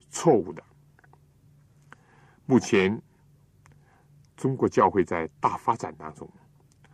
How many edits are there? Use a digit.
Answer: 0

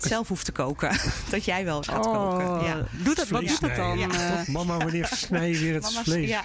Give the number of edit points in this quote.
1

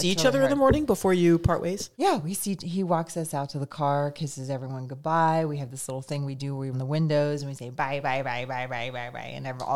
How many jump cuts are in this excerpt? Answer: 2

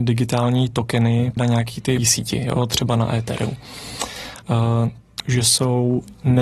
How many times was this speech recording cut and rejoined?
3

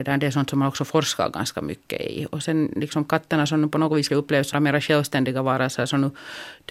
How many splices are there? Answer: 2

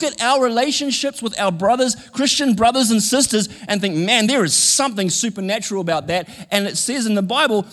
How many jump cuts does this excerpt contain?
0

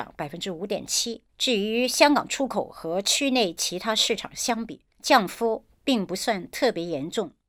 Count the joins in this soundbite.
2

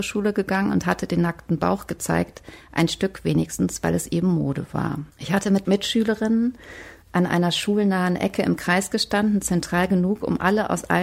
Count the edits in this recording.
1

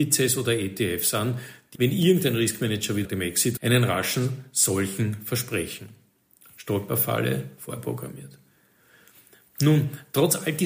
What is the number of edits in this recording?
3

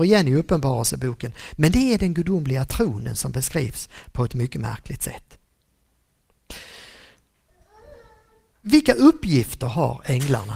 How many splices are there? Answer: 0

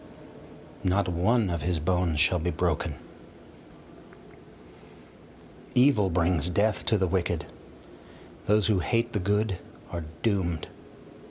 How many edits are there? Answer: 0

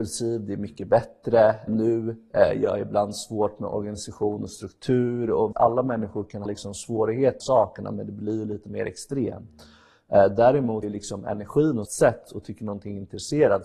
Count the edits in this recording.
6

